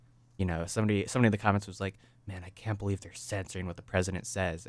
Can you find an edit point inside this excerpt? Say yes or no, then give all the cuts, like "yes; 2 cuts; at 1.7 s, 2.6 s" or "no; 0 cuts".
no; 0 cuts